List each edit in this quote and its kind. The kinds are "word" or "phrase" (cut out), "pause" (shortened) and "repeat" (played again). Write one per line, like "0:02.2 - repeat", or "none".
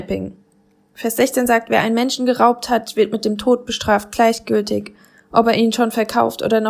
none